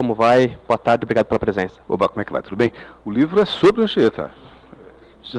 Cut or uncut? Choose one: cut